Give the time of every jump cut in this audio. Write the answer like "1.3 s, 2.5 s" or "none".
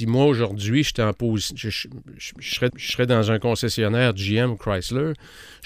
2.7 s